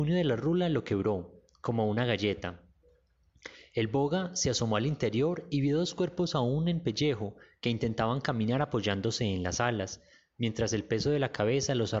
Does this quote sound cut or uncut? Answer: uncut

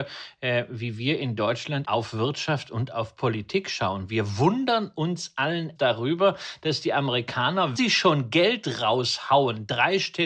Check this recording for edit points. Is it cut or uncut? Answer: cut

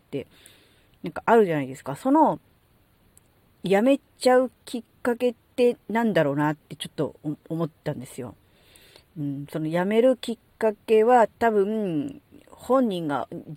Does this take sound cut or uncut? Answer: uncut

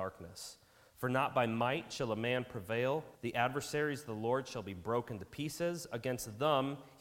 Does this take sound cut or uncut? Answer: cut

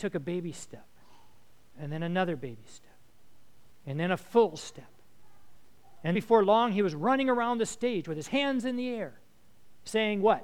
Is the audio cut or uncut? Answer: cut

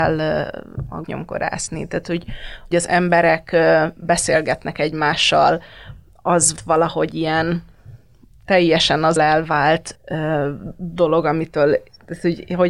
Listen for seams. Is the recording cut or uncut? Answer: cut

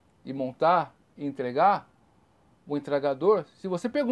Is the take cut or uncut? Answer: uncut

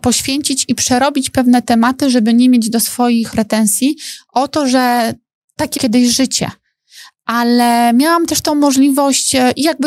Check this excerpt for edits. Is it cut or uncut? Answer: cut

